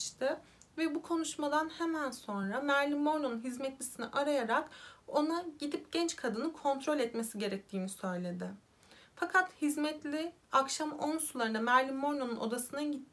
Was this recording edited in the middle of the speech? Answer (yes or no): no